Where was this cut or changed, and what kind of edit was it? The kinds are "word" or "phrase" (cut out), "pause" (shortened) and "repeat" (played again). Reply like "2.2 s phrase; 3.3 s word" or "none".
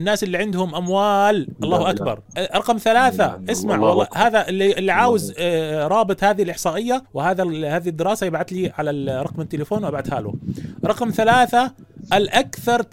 2.3 s pause; 7.1 s pause